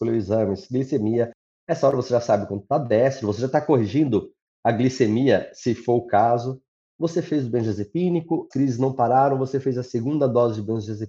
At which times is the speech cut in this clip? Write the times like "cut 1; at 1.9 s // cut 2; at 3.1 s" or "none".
cut 1; at 8.5 s